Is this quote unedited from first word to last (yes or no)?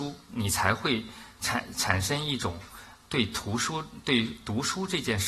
yes